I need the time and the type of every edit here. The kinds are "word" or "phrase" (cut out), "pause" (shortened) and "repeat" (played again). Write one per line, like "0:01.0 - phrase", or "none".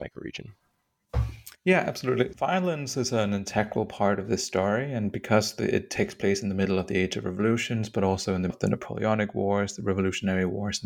0:02.3 - word
0:08.5 - word